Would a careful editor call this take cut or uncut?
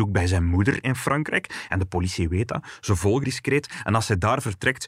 cut